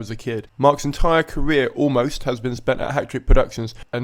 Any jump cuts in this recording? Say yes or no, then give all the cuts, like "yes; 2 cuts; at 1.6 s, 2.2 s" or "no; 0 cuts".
no; 0 cuts